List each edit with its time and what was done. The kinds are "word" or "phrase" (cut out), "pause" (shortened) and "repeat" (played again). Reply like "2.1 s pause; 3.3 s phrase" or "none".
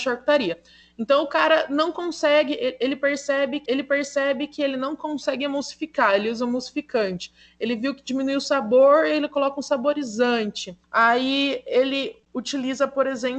3.7 s repeat; 10.8 s pause